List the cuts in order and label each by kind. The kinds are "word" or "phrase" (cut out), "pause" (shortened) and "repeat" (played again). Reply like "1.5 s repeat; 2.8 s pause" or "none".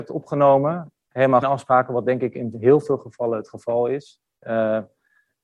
1.4 s word